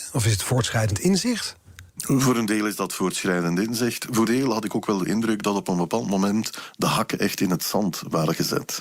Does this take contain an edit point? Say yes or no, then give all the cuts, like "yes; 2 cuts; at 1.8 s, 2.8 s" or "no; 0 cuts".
yes; 2 cuts; at 1.9 s, 4.3 s